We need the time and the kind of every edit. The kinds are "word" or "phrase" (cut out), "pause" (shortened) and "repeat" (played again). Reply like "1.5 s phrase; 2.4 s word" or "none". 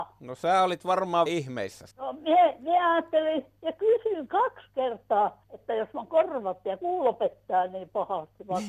1.3 s word; 1.9 s pause